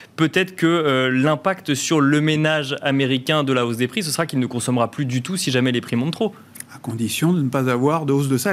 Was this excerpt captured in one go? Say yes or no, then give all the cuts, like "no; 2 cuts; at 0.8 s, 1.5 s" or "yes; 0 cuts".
yes; 0 cuts